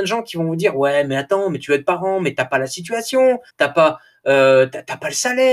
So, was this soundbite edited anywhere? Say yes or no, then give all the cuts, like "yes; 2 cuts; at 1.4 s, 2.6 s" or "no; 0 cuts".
yes; 1 cut; at 3.5 s